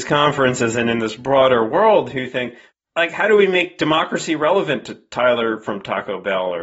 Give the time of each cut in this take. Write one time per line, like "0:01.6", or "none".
none